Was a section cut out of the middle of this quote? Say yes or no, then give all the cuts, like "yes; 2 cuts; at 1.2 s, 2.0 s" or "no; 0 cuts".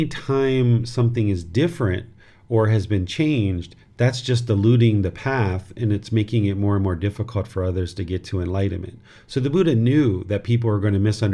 no; 0 cuts